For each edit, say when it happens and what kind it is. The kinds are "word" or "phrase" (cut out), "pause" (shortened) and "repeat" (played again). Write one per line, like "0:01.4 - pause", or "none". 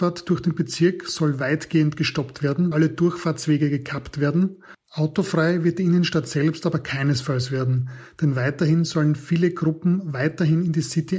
0:02.7 - word
0:04.7 - pause